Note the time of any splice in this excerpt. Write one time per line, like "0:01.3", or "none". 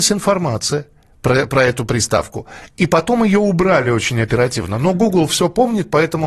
none